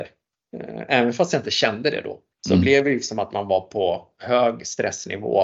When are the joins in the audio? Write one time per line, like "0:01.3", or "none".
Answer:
none